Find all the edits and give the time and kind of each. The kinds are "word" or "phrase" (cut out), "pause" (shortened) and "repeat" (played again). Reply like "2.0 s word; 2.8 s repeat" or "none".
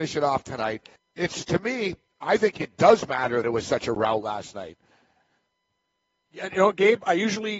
1.0 s pause; 3.4 s word